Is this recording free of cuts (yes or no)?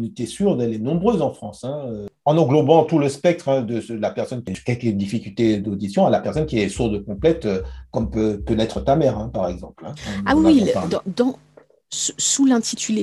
yes